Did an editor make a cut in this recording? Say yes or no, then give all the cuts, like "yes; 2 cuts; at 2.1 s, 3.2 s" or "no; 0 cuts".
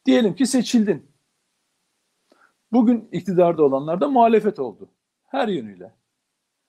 no; 0 cuts